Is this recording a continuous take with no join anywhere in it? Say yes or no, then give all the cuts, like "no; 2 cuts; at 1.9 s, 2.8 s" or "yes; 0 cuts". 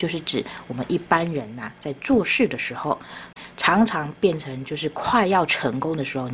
yes; 0 cuts